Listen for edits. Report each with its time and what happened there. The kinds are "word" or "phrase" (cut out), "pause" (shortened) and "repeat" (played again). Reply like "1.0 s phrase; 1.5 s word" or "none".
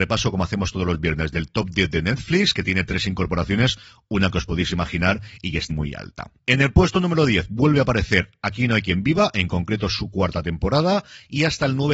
5.7 s word